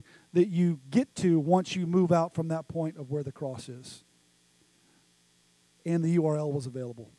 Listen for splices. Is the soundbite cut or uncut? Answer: uncut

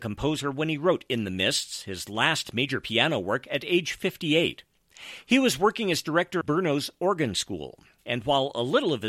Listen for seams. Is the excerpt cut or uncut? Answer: cut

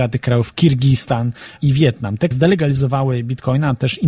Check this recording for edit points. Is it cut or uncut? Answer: cut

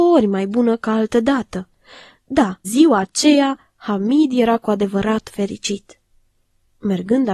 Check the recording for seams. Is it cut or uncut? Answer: cut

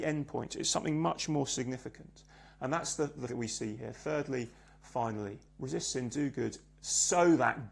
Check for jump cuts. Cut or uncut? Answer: cut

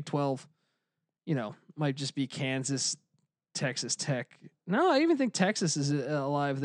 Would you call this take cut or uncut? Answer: uncut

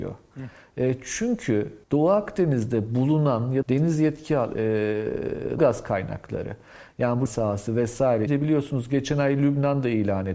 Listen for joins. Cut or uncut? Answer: cut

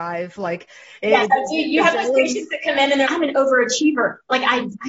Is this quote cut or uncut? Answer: cut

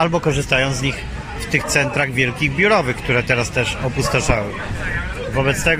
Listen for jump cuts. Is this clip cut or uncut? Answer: uncut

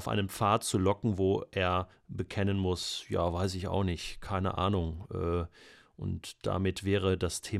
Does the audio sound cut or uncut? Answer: uncut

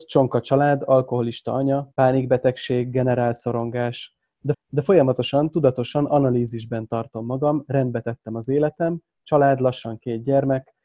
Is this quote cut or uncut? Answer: cut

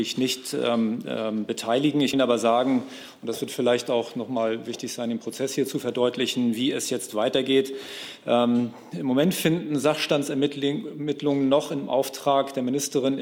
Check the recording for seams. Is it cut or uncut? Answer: cut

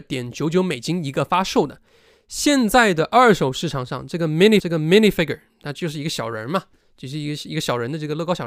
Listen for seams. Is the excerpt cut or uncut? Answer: cut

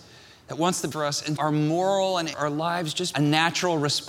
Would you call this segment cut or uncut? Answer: cut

